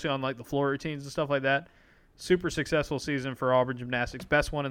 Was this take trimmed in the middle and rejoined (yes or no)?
no